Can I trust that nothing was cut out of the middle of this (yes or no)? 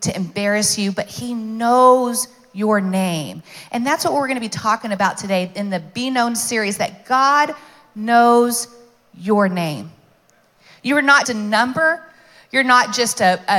no